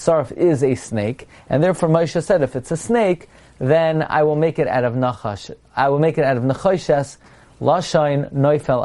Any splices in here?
no; 0 cuts

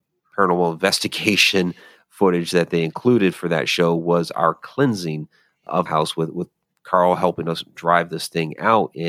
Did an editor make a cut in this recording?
yes; 1 cut; at 5.9 s

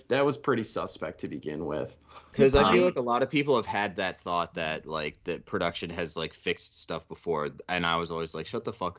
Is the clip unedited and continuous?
yes; 0 cuts

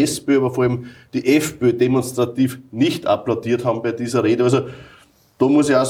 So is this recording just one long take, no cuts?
yes; 0 cuts

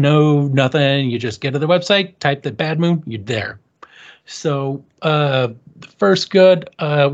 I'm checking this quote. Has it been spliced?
no; 0 cuts

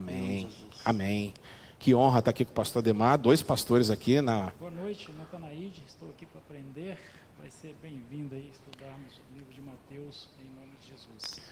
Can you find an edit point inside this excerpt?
no; 0 cuts

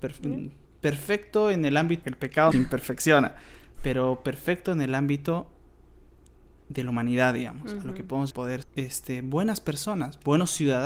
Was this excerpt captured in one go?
no; 4 cuts; at 2.0 s, 2.5 s, 8.3 s, 8.6 s

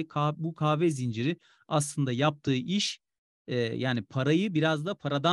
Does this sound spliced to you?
no; 0 cuts

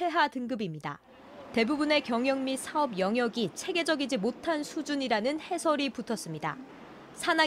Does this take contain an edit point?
no; 0 cuts

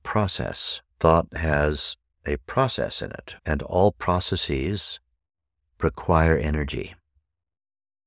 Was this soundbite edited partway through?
yes; 2 cuts; at 0.9 s, 3.4 s

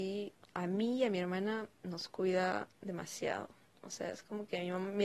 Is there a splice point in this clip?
no; 0 cuts

